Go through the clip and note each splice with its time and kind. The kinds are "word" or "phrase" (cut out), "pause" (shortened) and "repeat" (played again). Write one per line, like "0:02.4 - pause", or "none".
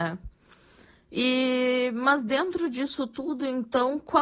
none